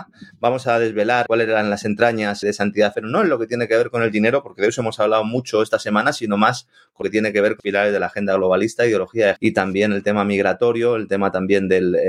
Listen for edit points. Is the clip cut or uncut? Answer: cut